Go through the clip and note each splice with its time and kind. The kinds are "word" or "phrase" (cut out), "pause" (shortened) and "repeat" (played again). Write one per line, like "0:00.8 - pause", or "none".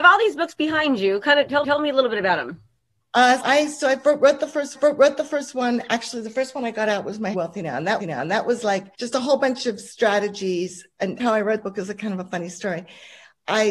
0:01.6 - repeat
0:03.4 - word
0:04.7 - repeat
0:07.3 - phrase
0:08.0 - repeat
0:08.9 - pause
0:11.2 - word
0:11.6 - word

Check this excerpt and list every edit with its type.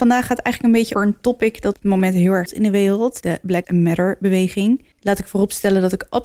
0:00.9 - word
0:01.7 - word
0:02.5 - word
0:03.2 - word
0:03.6 - word
0:04.9 - pause

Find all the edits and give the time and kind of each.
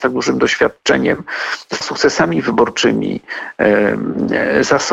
0:01.8 - word

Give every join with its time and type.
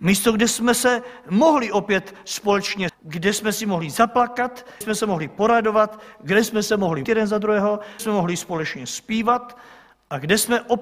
0:02.9 - word
0:04.8 - word
0:07.0 - word
0:08.0 - word

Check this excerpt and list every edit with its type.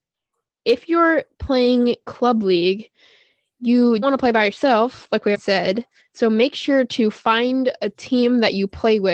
0:04.0 - word
0:05.3 - word
0:06.0 - pause

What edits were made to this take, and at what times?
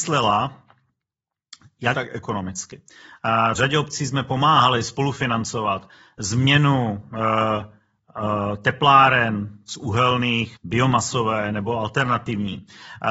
0:01.9 - word
0:03.5 - word
0:10.6 - word

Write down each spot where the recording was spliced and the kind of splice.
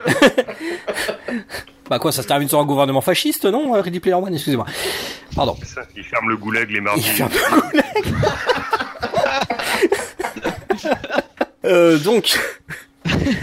none

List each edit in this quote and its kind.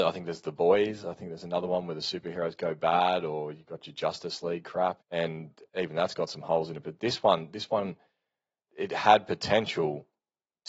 0:05.0 - word
0:05.7 - pause
0:08.7 - word

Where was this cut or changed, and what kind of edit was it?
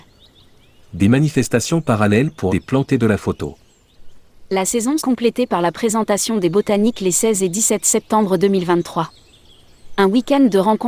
0:02.5 - word
0:05.0 - word

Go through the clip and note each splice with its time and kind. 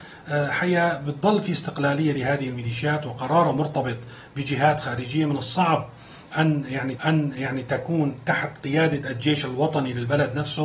0:07.0 - repeat

